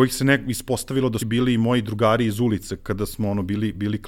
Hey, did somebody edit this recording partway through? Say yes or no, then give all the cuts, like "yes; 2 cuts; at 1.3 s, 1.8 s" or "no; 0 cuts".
yes; 2 cuts; at 1.2 s, 2.8 s